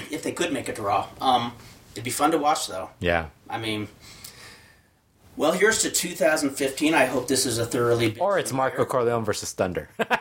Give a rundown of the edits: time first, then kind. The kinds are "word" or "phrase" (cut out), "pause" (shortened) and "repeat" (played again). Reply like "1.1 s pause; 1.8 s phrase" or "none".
none